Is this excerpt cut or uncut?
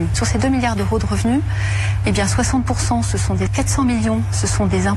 cut